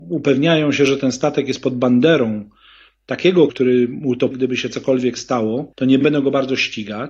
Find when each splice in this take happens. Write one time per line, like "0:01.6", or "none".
0:03.5
0:04.3